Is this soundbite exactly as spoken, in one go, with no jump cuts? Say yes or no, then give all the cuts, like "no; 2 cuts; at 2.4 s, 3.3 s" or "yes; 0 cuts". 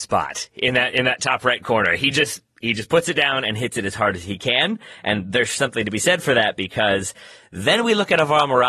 yes; 0 cuts